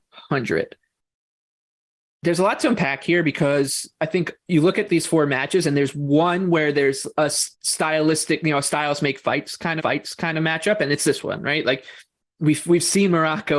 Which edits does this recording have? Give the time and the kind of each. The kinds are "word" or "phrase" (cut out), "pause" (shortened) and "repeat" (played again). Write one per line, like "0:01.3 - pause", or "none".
0:07.5 - pause
0:09.8 - repeat